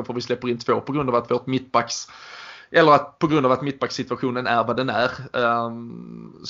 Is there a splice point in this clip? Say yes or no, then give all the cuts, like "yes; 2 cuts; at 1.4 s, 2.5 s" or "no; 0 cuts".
no; 0 cuts